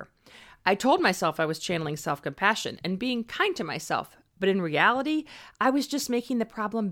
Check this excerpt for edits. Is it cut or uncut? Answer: uncut